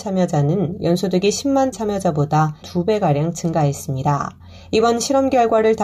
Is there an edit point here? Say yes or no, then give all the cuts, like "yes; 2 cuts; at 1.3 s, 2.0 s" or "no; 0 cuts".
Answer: yes; 3 cuts; at 1.7 s, 2.6 s, 4.6 s